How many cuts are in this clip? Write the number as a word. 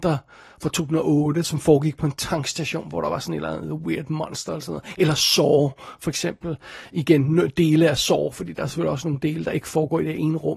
zero